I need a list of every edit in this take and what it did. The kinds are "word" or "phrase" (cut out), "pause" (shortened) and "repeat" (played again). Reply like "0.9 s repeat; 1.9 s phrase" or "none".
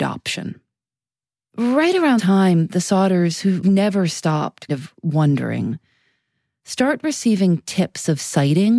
2.2 s word; 3.6 s word; 4.7 s word